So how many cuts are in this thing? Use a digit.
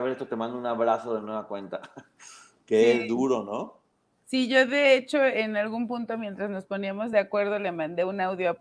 0